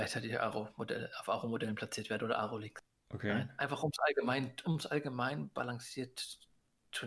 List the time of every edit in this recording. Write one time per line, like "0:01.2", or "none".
0:04.6